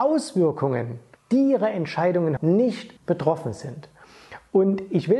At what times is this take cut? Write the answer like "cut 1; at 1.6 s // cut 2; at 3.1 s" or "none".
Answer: cut 1; at 1.2 s // cut 2; at 2.4 s // cut 3; at 3.0 s